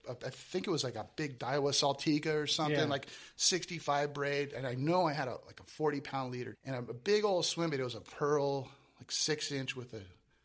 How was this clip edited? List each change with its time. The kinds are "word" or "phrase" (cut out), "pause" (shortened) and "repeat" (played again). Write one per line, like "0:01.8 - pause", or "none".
0:01.4 - word
0:06.5 - word